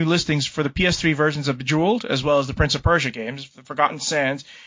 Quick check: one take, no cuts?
yes; 0 cuts

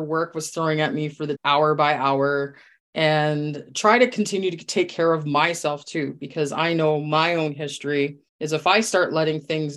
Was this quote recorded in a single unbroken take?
no; 3 cuts; at 1.3 s, 2.8 s, 8.3 s

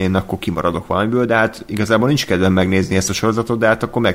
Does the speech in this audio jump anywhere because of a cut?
no; 0 cuts

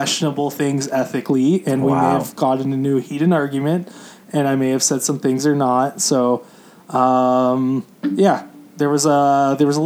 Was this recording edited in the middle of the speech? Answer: no; 0 cuts

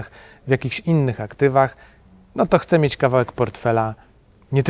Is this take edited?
no; 0 cuts

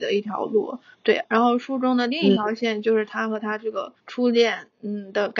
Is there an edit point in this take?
yes; 2 cuts; at 0.9 s, 4.0 s

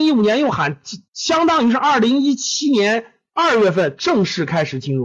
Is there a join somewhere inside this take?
yes; 1 cut; at 1.1 s

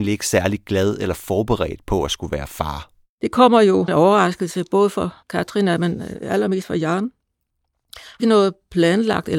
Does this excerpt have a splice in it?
yes; 3 cuts; at 3.9 s, 5.2 s, 8.2 s

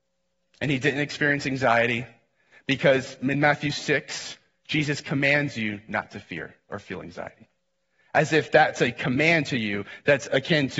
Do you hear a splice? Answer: no; 0 cuts

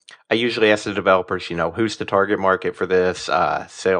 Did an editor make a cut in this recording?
no; 0 cuts

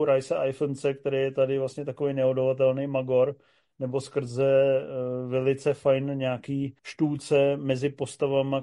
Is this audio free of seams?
no; 1 cut; at 6.8 s

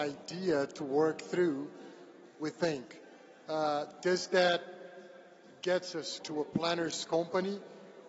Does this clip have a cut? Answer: yes; 1 cut; at 6.2 s

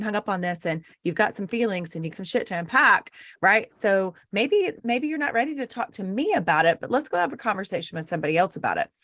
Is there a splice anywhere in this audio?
yes; 2 cuts; at 2.1 s, 4.8 s

